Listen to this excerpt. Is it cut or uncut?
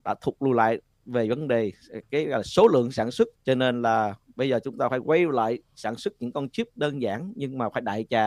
cut